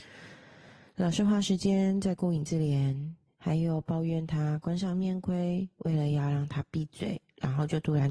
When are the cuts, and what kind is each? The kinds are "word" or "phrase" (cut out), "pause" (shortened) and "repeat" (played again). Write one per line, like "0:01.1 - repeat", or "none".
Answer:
0:03.3 - pause